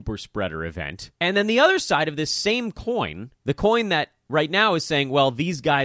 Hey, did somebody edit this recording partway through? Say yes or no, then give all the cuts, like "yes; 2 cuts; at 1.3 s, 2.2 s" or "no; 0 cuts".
yes; 2 cuts; at 1.1 s, 3.4 s